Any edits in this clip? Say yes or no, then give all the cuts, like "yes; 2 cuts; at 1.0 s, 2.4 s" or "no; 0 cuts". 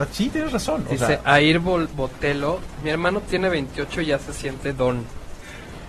no; 0 cuts